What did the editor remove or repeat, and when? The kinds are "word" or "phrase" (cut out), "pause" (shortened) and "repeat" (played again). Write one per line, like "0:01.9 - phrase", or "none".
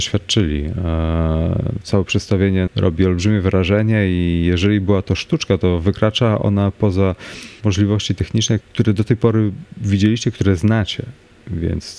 0:02.7 - word
0:07.6 - word
0:08.6 - word